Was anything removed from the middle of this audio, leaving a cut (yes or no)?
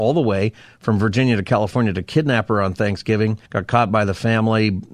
yes